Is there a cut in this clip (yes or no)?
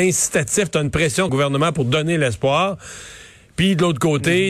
yes